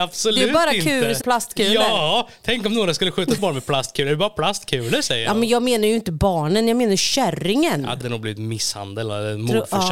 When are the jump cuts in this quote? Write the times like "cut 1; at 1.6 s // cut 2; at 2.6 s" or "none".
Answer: cut 1; at 1.2 s // cut 2; at 3.4 s // cut 3; at 8.0 s

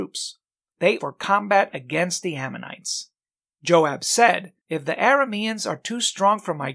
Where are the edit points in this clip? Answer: cut 1; at 1.0 s // cut 2; at 4.6 s

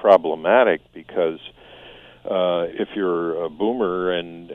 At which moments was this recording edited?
cut 1; at 2.7 s

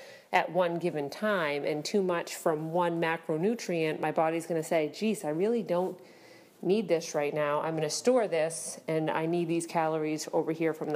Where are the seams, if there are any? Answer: none

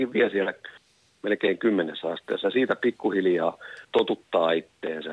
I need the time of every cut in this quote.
cut 1; at 3.8 s

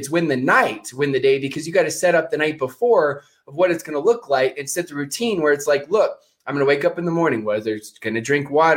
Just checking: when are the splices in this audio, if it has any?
none

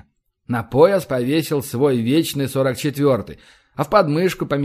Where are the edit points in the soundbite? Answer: none

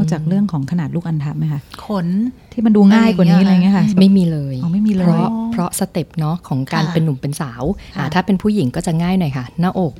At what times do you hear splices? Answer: cut 1; at 3.9 s

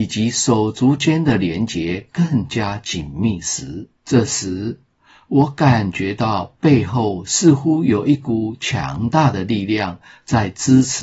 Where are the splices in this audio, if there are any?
cut 1; at 4.0 s

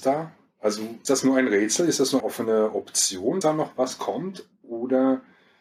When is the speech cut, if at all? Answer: cut 1; at 1.1 s // cut 2; at 2.2 s // cut 3; at 3.4 s

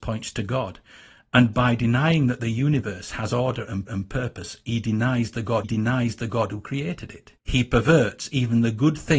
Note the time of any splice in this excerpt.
cut 1; at 3.9 s // cut 2; at 5.6 s // cut 3; at 7.4 s

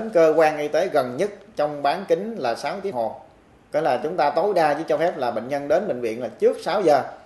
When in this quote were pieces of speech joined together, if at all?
cut 1; at 2.9 s

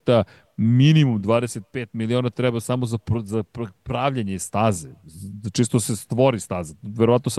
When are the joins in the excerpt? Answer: none

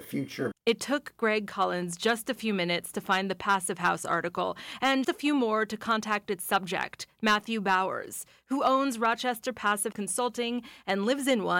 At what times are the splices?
cut 1; at 5.0 s // cut 2; at 9.9 s

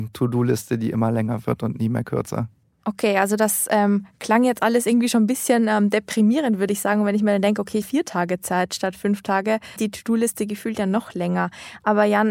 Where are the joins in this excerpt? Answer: cut 1; at 2.6 s // cut 2; at 7.8 s // cut 3; at 9.8 s

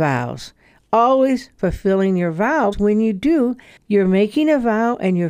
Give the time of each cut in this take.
cut 1; at 2.7 s

